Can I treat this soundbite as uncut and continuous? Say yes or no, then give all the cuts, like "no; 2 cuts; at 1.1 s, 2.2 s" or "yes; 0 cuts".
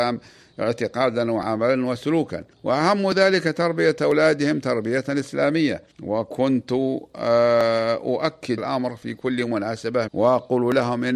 no; 4 cuts; at 2.5 s, 5.9 s, 8.6 s, 10.1 s